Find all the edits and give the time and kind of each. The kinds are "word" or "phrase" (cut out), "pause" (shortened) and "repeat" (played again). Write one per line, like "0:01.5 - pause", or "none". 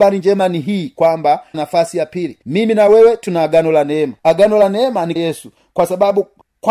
0:01.5 - phrase
0:02.4 - pause
0:04.2 - pause
0:05.2 - word